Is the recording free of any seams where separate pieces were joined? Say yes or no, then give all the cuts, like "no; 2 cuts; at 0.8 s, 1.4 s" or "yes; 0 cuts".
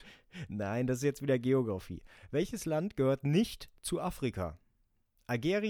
yes; 0 cuts